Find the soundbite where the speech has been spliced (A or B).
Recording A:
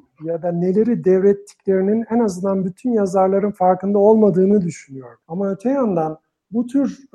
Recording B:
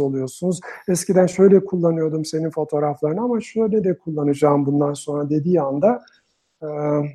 A